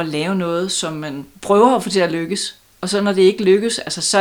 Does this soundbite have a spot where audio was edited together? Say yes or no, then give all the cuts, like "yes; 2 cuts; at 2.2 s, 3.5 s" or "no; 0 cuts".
no; 0 cuts